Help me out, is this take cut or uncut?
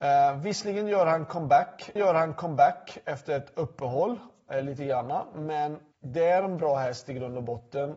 cut